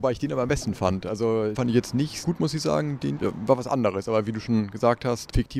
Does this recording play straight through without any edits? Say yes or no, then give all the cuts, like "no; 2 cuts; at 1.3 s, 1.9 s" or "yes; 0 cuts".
no; 3 cuts; at 1.5 s, 2.2 s, 3.2 s